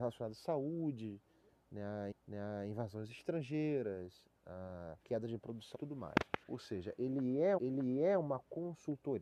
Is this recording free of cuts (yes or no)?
no